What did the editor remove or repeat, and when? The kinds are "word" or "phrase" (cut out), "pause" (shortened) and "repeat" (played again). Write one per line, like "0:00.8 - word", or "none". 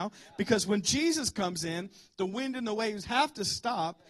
none